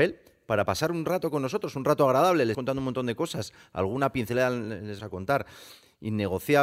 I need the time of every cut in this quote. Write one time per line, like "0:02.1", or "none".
0:02.5
0:05.0